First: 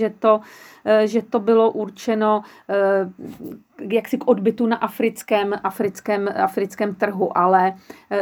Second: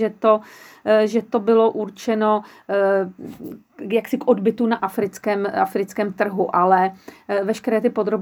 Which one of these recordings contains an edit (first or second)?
second